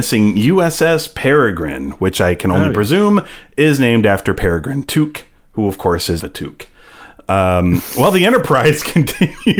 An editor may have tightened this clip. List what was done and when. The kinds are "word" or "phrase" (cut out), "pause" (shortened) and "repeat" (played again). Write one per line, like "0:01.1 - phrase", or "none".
0:06.2 - phrase